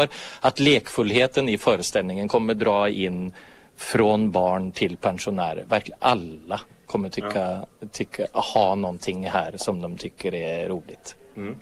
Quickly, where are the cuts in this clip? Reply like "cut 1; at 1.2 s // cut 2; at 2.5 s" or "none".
none